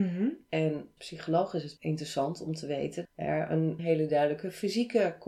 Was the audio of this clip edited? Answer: yes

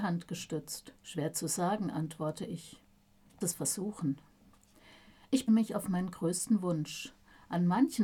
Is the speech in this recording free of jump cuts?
no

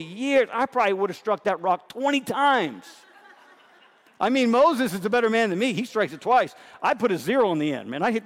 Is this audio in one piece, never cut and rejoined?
yes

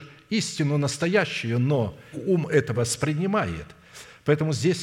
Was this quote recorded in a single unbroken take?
no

